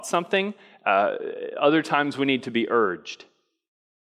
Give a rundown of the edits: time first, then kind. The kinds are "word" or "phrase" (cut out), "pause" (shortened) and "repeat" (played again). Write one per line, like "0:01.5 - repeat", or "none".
none